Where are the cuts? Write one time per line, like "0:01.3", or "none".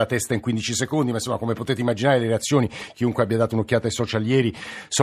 none